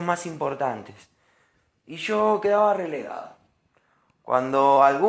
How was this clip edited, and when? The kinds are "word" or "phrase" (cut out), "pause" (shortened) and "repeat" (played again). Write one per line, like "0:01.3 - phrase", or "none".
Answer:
none